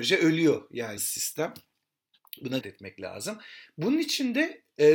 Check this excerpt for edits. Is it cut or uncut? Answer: cut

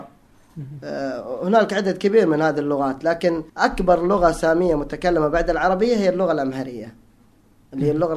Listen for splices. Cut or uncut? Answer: cut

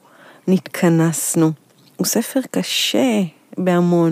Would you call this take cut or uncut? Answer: uncut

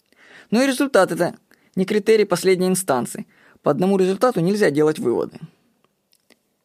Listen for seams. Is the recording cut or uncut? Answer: uncut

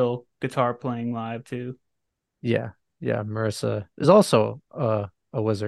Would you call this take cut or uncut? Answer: uncut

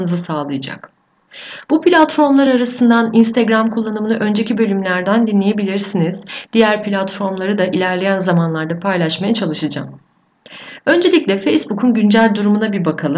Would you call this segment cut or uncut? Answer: uncut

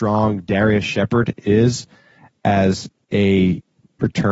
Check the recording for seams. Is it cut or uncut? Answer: uncut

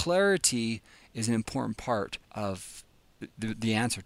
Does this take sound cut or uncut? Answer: cut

